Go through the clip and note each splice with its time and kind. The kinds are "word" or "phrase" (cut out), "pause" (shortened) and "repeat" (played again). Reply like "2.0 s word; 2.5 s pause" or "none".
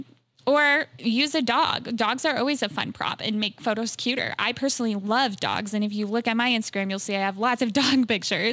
none